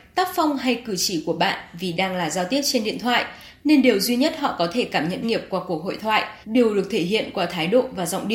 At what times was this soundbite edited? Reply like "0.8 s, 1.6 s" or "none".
5.2 s, 6.4 s